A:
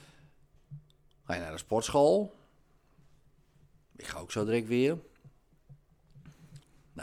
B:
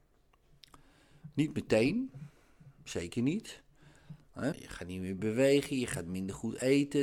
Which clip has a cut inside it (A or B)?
B